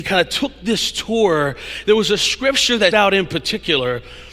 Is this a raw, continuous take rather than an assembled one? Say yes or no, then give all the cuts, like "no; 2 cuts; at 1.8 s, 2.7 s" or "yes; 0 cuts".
no; 1 cut; at 2.9 s